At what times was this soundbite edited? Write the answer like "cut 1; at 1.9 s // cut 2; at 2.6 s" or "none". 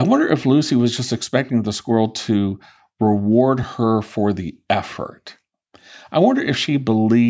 none